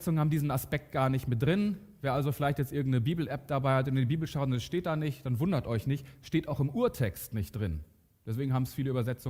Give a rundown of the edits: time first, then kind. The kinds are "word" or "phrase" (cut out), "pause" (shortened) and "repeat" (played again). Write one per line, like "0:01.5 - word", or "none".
none